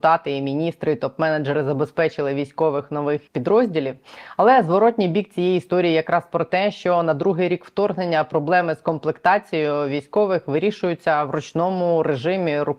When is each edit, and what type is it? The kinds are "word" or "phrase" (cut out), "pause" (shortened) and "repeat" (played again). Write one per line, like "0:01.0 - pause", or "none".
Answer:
0:03.3 - pause